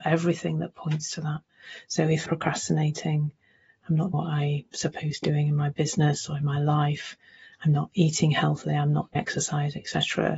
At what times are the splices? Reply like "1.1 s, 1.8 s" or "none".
2.3 s, 4.1 s, 5.2 s, 9.2 s

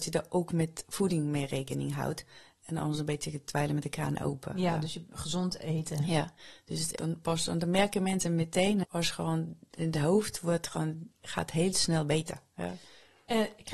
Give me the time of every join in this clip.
7.0 s, 8.8 s

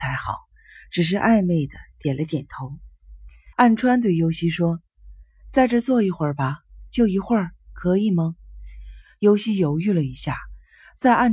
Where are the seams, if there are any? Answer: 3.5 s

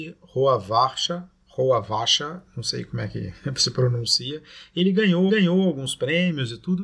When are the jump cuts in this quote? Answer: 1.4 s, 5.3 s

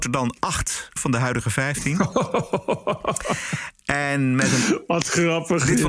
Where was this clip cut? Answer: 1.0 s

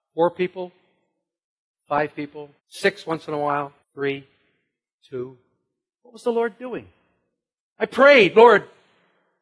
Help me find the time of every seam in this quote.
2.6 s, 3.8 s

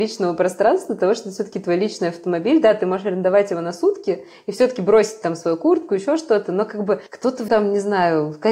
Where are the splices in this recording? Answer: 7.1 s, 7.5 s

